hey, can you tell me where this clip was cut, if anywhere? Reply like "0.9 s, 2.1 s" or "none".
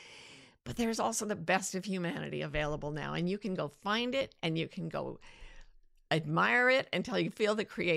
none